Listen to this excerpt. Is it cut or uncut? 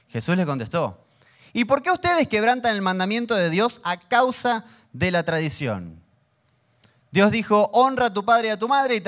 uncut